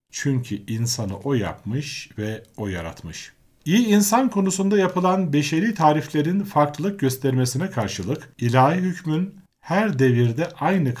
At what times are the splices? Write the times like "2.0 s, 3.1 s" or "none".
3.5 s, 8.3 s, 9.5 s